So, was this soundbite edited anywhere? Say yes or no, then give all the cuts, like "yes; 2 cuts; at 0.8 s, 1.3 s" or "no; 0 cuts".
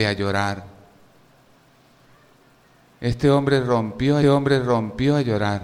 yes; 1 cut; at 4.2 s